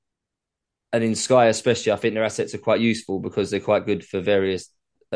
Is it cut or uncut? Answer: uncut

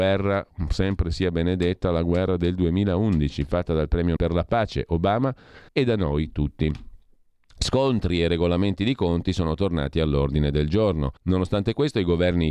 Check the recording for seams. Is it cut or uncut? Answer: cut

